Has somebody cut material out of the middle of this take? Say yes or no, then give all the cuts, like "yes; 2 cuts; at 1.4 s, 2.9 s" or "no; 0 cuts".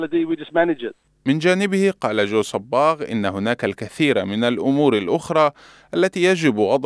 no; 0 cuts